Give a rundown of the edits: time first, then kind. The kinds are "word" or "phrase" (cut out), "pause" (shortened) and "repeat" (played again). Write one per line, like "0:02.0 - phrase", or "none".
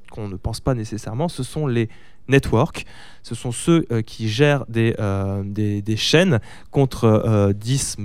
none